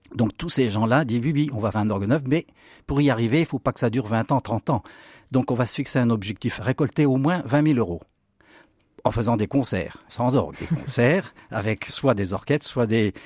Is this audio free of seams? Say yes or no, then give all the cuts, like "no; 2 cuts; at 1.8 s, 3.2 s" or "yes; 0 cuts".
no; 5 cuts; at 1.7 s, 6.6 s, 10.1 s, 10.5 s, 11.9 s